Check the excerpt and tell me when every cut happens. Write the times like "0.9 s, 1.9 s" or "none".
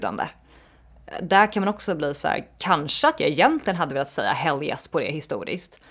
none